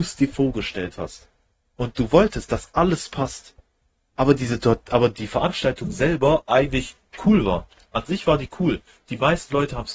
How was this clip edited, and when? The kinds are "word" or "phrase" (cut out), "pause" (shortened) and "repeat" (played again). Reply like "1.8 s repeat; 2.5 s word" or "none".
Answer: 1.5 s pause